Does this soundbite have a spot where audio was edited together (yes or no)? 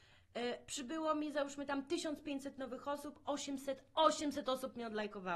no